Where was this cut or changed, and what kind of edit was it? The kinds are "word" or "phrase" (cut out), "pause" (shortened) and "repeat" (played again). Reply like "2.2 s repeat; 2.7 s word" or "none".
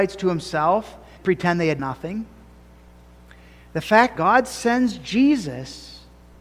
1.2 s word; 1.8 s word; 4.2 s word